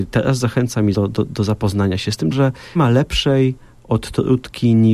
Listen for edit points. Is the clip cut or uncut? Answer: cut